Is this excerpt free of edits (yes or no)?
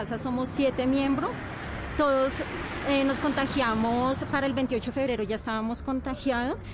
yes